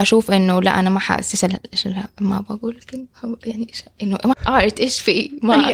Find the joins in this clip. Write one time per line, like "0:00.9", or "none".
0:04.3